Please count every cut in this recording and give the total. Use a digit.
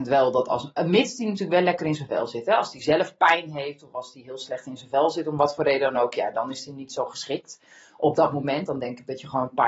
0